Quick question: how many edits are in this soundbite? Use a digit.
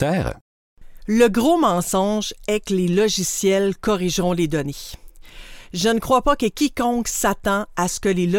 0